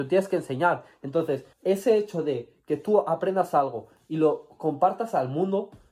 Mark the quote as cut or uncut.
cut